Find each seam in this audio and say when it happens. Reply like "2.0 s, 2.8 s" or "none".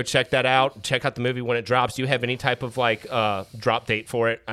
none